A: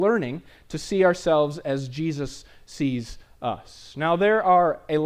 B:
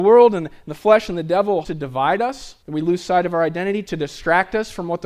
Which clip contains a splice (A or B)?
B